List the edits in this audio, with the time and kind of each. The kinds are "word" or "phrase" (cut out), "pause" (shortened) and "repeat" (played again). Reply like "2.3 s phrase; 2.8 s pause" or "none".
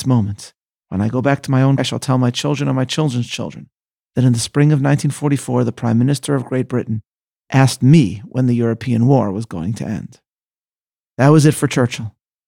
1.8 s word